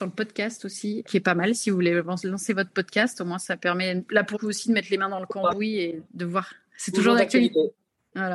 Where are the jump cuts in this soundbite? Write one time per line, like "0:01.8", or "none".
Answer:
0:01.0
0:04.3
0:06.0